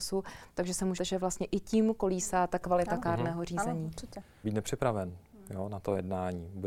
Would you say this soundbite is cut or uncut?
cut